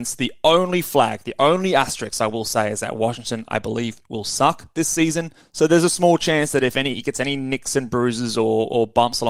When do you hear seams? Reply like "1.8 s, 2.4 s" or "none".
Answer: 5.4 s